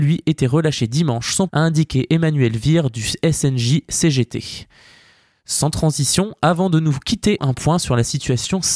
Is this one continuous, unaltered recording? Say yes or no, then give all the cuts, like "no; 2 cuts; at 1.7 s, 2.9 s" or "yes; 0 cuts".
no; 2 cuts; at 1.5 s, 7.4 s